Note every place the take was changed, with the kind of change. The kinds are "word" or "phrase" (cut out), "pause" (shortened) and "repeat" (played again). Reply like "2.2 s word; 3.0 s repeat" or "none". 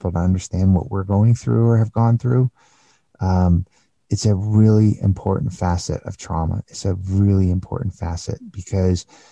none